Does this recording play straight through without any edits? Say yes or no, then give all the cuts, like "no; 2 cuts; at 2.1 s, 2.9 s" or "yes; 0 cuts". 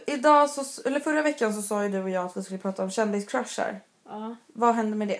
yes; 0 cuts